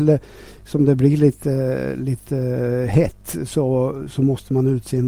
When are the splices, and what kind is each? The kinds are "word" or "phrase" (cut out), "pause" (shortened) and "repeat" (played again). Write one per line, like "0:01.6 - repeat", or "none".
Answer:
none